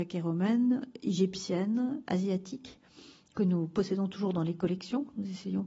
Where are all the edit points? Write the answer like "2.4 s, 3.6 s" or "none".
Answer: none

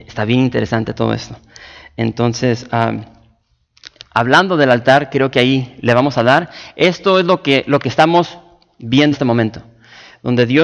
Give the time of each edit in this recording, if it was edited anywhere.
9.1 s

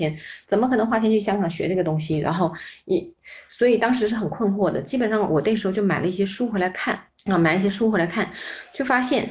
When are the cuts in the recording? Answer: 7.1 s

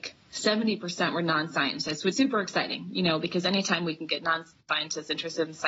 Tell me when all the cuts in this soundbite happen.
2.1 s

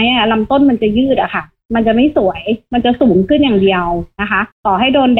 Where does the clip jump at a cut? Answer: none

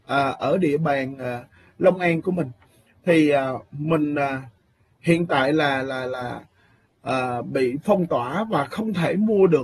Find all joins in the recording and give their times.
none

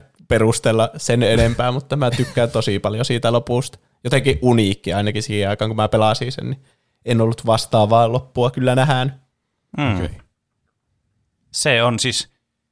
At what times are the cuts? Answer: none

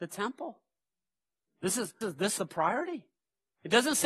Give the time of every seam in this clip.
2.0 s, 2.4 s

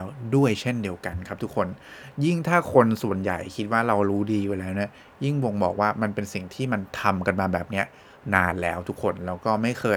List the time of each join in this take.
none

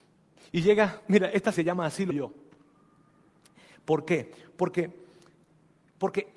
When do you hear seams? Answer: 1.5 s, 2.1 s

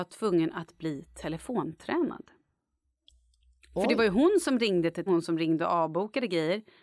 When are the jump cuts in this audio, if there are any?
5.1 s

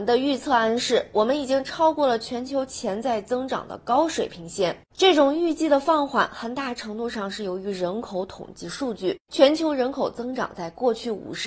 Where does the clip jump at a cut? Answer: 4.9 s, 9.2 s

